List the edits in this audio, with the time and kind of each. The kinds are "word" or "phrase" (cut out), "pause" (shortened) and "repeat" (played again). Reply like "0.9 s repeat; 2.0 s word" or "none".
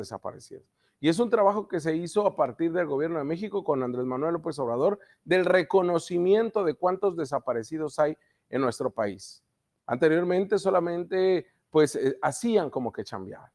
none